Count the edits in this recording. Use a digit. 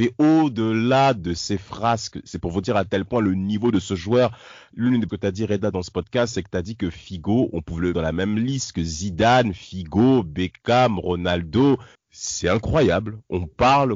3